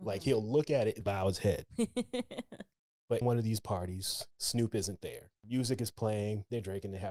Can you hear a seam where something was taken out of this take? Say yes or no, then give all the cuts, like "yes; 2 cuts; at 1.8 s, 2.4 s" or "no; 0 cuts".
yes; 3 cuts; at 1.0 s, 3.2 s, 4.3 s